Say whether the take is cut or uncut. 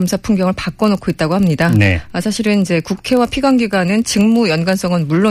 uncut